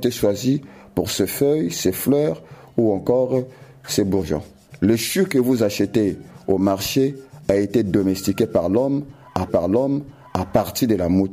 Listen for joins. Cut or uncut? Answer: cut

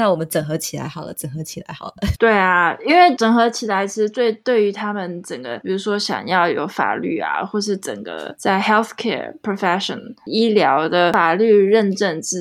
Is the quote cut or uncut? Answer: uncut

